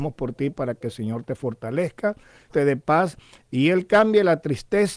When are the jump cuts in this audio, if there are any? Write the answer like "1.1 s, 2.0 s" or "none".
2.5 s